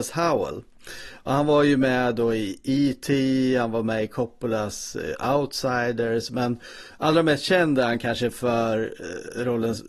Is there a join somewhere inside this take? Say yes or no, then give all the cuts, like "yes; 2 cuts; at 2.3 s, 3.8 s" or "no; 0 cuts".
no; 0 cuts